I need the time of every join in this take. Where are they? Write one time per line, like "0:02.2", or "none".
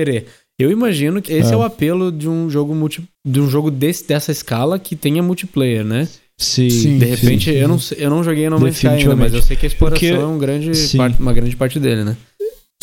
0:01.3